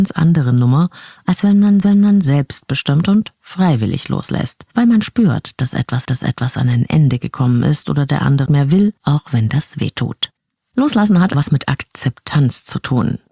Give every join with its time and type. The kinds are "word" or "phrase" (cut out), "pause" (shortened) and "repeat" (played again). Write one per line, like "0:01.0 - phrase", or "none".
0:01.8 - repeat
0:04.7 - pause
0:06.0 - repeat
0:08.5 - word
0:09.0 - pause
0:10.5 - pause
0:11.3 - word